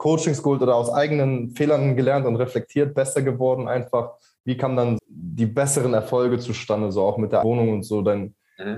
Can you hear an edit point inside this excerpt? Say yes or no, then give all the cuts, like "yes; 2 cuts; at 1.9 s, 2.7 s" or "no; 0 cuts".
yes; 2 cuts; at 5.0 s, 7.4 s